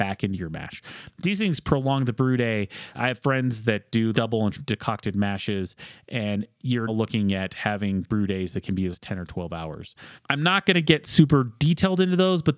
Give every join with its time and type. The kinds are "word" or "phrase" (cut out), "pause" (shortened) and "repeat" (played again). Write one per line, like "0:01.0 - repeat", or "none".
0:02.9 - word
0:04.1 - word
0:04.5 - word
0:06.9 - word
0:08.9 - word
0:10.2 - word

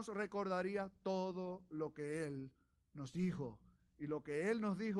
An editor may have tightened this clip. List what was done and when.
none

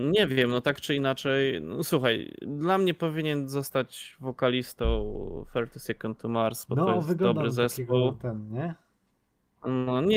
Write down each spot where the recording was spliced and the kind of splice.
none

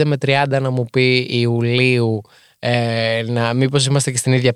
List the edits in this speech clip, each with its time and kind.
none

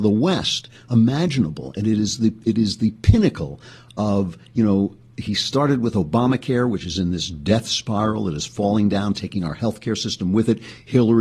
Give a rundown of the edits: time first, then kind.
none

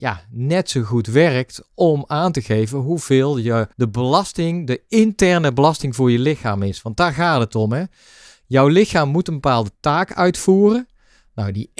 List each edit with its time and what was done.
0:03.7 - pause

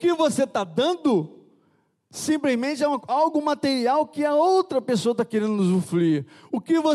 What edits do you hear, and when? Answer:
none

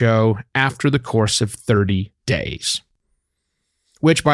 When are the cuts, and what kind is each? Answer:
0:02.2 - pause

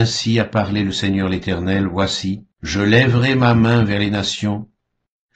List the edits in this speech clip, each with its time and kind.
0:02.5 - pause

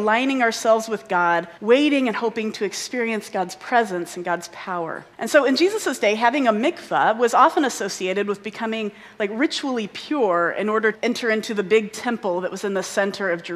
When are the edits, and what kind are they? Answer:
0:01.6 - pause
0:05.1 - pause
0:10.9 - word

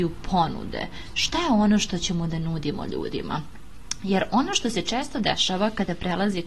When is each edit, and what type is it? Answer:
none

